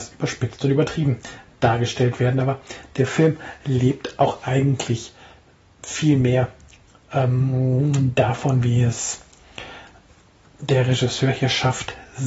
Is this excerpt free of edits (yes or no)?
yes